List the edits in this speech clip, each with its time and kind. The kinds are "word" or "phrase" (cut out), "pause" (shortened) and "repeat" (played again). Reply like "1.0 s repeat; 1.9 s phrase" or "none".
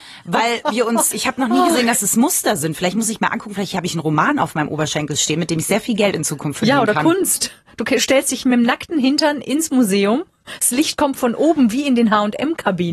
1.1 s word